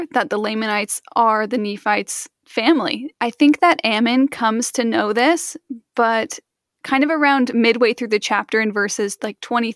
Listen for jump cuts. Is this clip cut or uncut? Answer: uncut